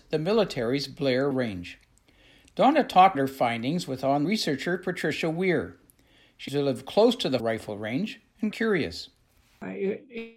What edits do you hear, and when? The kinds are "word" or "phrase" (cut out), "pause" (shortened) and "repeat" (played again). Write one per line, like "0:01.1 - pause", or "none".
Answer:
0:01.3 - word
0:03.1 - word
0:04.2 - word
0:06.5 - word
0:07.4 - word
0:08.5 - word